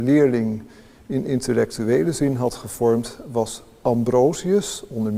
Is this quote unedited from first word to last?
yes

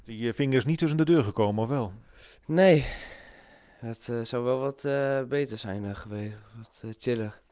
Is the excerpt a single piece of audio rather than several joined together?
yes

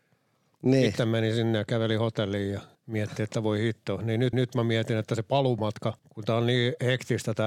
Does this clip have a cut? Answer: yes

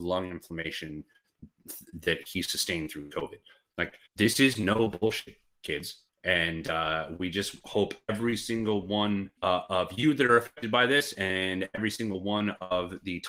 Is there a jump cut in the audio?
yes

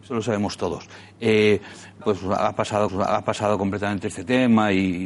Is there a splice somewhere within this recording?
yes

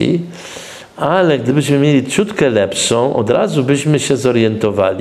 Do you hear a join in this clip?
no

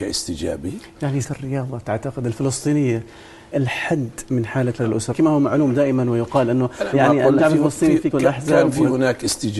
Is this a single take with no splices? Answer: no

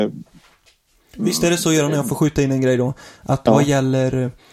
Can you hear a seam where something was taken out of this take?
no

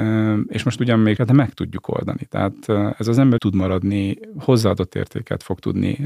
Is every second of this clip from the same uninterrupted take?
no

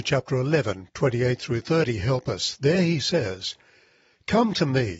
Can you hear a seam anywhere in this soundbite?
no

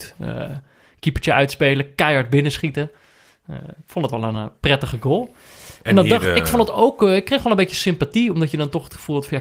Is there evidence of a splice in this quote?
no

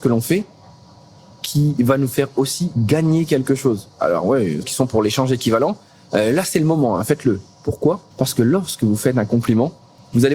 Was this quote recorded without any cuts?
no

